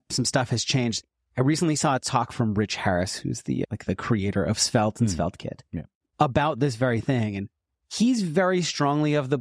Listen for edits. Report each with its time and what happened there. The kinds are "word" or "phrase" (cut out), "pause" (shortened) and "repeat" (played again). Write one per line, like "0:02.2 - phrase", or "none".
none